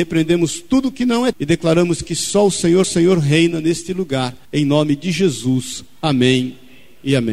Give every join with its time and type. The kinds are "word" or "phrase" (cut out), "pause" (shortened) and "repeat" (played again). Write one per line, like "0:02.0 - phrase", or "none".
0:01.3 - word
0:02.8 - repeat
0:04.4 - pause

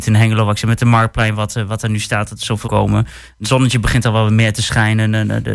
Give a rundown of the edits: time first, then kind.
0:02.6 - phrase

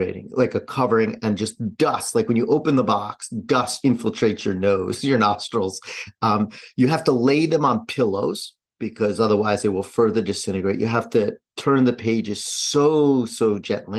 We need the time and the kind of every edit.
0:03.8 - word

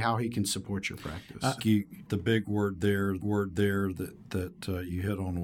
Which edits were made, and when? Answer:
0:01.6 - phrase
0:02.1 - word
0:03.2 - repeat

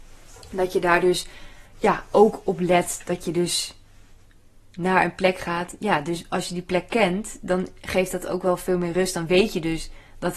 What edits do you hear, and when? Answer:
none

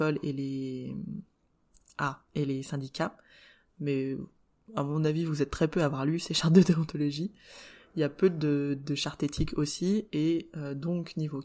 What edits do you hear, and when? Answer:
none

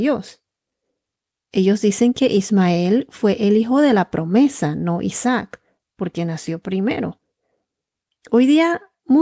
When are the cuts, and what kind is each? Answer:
none

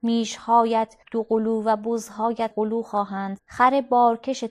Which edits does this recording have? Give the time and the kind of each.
0:01.0 - pause
0:02.5 - word
0:03.4 - word

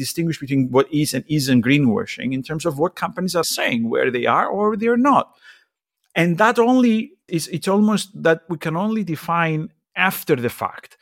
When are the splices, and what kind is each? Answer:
0:03.4 - word
0:07.3 - word

